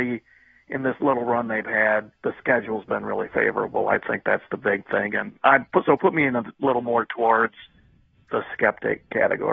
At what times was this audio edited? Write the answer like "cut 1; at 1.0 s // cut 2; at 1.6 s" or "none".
cut 1; at 2.1 s